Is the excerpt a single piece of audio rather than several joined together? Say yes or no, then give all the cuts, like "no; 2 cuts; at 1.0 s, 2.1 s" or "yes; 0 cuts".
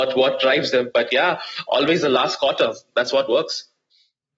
yes; 0 cuts